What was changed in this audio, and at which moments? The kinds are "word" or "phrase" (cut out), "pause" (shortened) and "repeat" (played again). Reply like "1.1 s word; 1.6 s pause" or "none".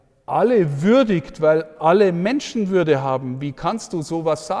none